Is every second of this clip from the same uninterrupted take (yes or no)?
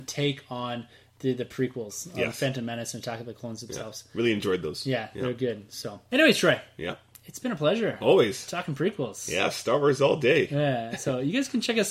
yes